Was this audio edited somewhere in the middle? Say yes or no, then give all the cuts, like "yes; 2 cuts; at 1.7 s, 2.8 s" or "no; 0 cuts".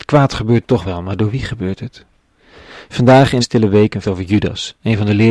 yes; 2 cuts; at 3.4 s, 4.0 s